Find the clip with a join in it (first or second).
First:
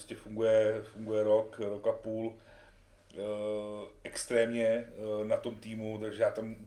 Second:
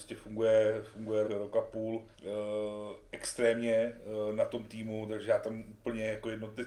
second